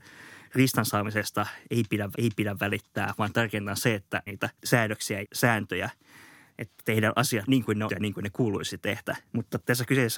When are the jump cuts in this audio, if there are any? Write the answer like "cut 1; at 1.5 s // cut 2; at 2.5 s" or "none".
cut 1; at 2.1 s // cut 2; at 4.3 s // cut 3; at 5.2 s // cut 4; at 7.9 s // cut 5; at 9.3 s